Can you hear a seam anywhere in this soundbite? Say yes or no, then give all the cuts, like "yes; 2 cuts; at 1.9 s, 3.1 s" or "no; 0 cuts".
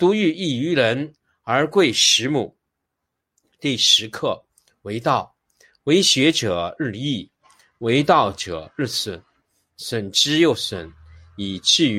no; 0 cuts